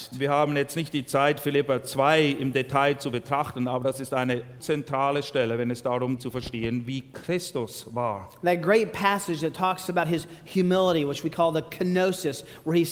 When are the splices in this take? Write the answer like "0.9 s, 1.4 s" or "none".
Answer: 4.6 s, 6.2 s